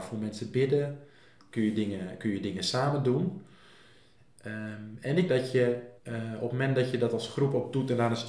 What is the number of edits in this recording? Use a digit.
2